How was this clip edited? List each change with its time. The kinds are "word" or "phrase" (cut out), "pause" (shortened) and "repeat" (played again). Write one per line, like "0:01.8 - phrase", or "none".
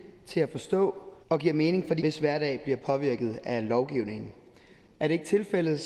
0:01.2 - pause
0:02.0 - word